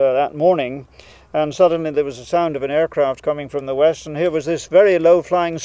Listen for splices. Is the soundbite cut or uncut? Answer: uncut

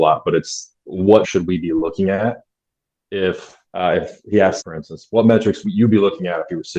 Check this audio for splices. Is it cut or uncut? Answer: cut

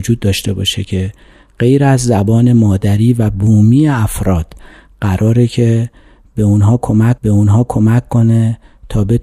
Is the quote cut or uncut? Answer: cut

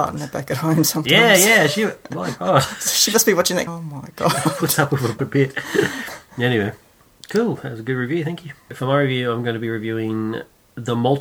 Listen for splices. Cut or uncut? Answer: cut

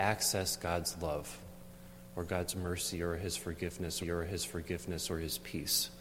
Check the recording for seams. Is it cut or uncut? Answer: cut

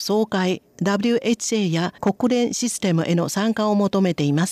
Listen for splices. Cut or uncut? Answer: cut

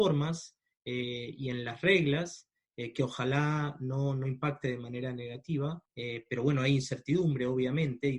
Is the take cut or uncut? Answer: cut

